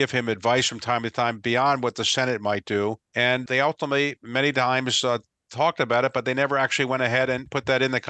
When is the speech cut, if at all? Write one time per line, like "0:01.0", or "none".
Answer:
none